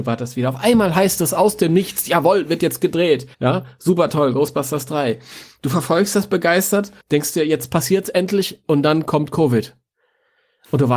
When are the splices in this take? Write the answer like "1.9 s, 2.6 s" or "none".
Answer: 3.3 s, 7.0 s